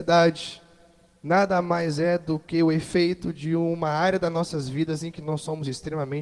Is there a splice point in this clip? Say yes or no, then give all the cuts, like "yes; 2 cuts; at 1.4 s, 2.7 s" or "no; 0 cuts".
no; 0 cuts